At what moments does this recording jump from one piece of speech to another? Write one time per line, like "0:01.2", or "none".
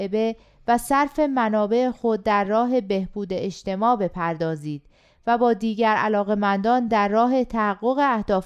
none